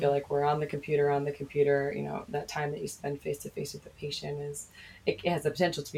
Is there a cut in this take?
no; 0 cuts

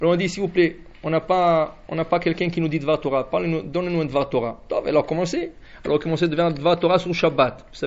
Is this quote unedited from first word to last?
yes; 0 cuts

